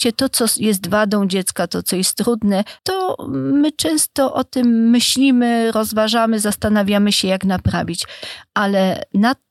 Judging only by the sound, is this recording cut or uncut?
cut